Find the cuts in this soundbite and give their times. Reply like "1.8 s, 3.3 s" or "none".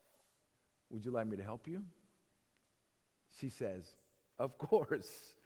none